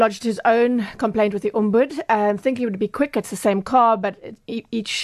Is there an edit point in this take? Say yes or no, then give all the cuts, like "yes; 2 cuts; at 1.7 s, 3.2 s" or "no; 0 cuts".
no; 0 cuts